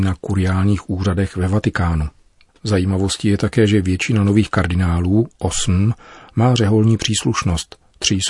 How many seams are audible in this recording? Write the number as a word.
zero